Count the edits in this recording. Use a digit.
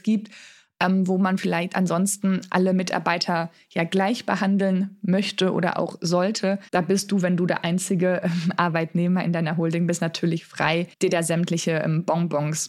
2